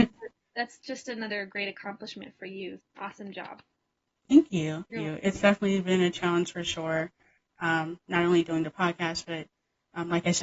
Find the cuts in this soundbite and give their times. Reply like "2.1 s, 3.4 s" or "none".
2.8 s, 4.9 s